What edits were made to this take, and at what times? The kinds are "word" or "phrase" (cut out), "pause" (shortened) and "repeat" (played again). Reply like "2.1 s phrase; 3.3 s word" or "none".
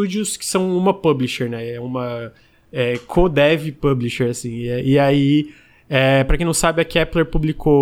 none

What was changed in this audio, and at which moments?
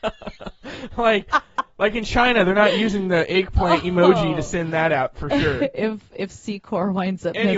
none

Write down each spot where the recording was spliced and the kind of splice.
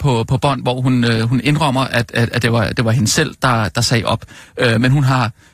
none

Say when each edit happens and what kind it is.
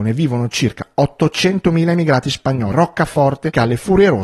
2.7 s word

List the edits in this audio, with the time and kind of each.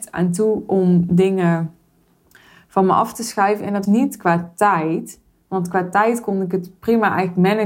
3.9 s word

